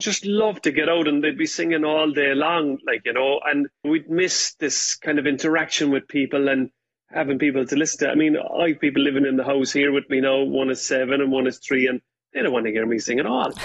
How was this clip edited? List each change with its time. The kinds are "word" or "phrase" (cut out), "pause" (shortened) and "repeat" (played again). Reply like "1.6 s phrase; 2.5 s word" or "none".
none

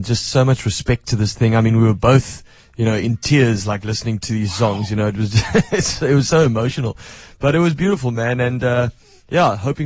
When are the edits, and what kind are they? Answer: none

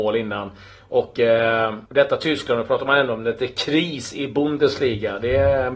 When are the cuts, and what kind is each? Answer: 1.9 s pause

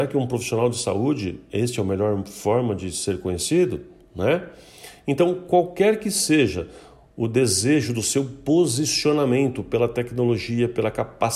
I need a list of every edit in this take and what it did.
none

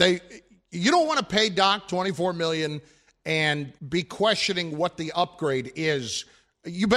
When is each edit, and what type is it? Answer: 3.8 s pause

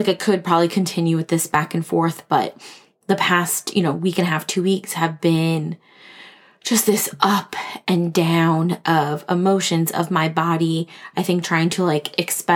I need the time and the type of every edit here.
none

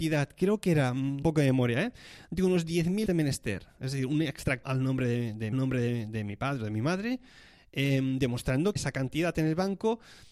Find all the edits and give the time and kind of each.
1.2 s phrase; 3.1 s phrase; 4.6 s word; 5.5 s repeat; 8.8 s word

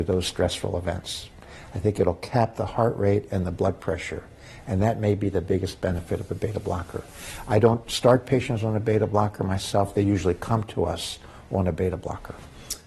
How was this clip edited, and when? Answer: none

